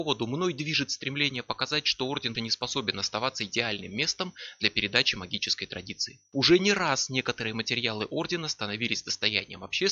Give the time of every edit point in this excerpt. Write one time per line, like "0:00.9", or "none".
0:02.3